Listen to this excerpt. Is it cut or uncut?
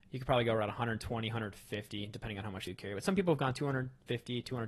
cut